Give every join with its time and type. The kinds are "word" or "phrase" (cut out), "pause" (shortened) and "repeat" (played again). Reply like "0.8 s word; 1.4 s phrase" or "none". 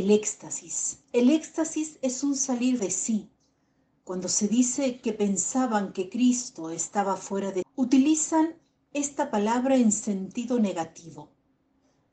1.0 s pause; 2.8 s word; 7.6 s word